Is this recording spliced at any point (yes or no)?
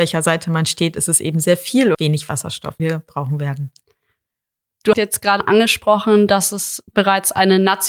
yes